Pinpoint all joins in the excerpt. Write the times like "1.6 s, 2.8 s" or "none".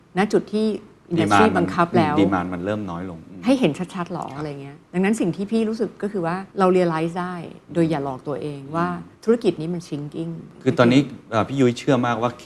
4.9 s, 6.5 s, 9.1 s